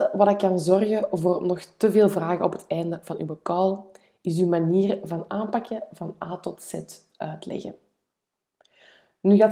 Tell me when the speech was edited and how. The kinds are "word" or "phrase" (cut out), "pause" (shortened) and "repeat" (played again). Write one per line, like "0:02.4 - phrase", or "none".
none